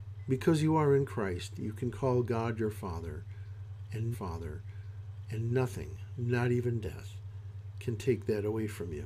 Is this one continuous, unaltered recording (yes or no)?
no